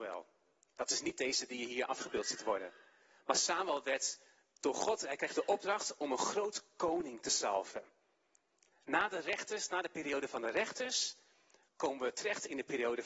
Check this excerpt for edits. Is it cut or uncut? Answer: uncut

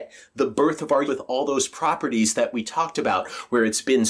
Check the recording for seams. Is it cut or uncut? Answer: cut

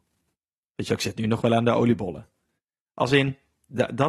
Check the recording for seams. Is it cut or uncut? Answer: uncut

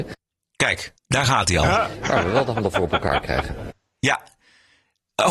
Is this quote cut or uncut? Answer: cut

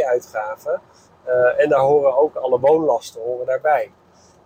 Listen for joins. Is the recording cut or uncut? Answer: uncut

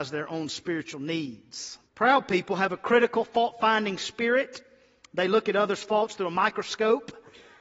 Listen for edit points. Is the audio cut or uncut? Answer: cut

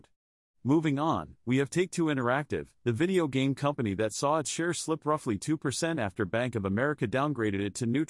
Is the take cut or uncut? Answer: uncut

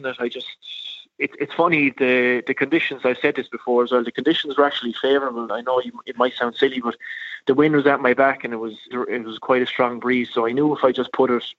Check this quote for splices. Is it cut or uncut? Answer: cut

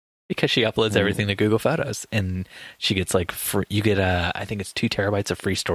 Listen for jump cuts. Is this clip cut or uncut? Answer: uncut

